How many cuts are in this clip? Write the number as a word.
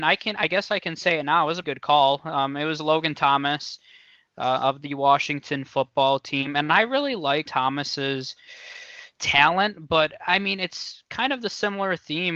two